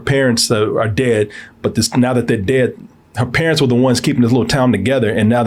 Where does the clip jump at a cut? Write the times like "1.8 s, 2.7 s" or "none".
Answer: none